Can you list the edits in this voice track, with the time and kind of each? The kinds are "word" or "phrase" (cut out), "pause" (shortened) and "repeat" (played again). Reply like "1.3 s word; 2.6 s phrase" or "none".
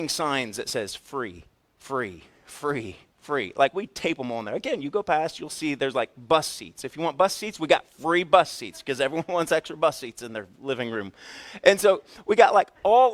none